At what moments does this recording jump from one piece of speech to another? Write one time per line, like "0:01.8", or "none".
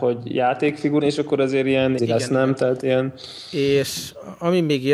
0:01.0
0:02.0